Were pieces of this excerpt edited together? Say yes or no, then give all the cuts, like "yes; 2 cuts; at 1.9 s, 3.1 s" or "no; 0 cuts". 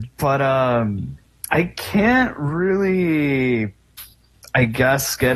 no; 0 cuts